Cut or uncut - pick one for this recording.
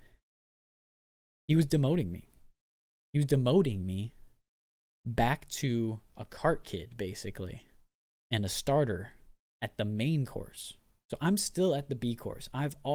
uncut